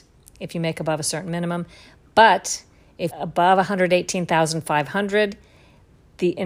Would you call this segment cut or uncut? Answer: cut